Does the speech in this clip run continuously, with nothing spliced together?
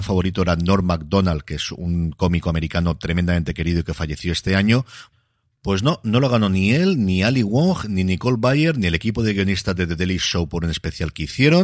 yes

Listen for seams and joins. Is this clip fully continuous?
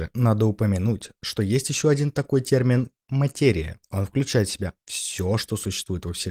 yes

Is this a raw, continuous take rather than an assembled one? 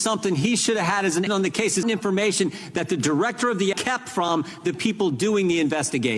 no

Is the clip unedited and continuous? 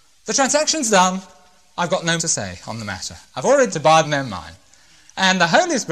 no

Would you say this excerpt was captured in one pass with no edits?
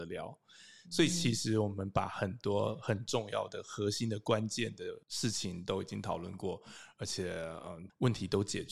no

